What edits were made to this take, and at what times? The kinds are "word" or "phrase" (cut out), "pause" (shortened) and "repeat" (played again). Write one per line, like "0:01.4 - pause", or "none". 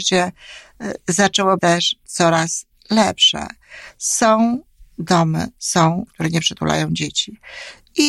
0:01.6 - word
0:06.1 - word